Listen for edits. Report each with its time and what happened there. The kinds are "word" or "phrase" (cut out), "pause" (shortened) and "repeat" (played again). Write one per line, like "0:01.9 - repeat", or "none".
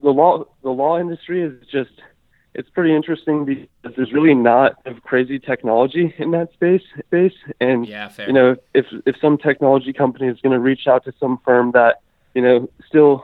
0:04.8 - pause
0:07.1 - repeat